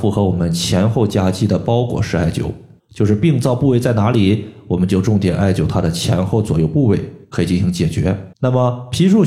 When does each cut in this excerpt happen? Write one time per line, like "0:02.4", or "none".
0:02.8
0:07.2
0:08.3